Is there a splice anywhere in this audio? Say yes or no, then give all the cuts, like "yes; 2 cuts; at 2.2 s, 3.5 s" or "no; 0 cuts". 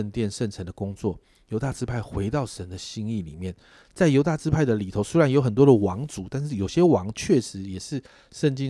no; 0 cuts